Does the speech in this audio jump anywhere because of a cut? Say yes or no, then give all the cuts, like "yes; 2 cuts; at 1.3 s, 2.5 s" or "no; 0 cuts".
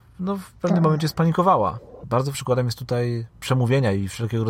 yes; 1 cut; at 2.3 s